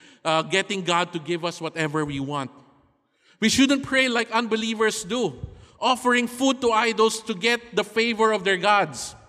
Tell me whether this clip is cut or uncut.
uncut